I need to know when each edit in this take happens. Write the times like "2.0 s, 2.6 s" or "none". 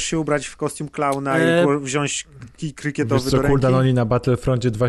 2.5 s